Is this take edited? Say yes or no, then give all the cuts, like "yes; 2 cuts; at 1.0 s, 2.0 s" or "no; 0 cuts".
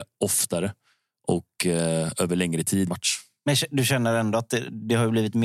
yes; 1 cut; at 2.9 s